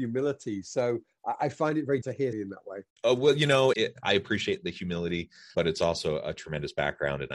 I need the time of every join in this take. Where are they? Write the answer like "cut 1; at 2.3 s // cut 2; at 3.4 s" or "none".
cut 1; at 2.0 s // cut 2; at 2.3 s // cut 3; at 2.9 s // cut 4; at 3.7 s // cut 5; at 5.5 s

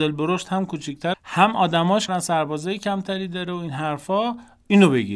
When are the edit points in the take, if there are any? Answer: cut 1; at 1.1 s // cut 2; at 2.1 s

